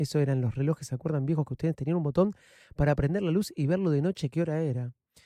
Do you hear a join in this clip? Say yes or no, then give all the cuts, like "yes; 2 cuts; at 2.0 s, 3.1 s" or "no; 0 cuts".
no; 0 cuts